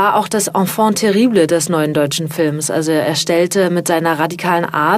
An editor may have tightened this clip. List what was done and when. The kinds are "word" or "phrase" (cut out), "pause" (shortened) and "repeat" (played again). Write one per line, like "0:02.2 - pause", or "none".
none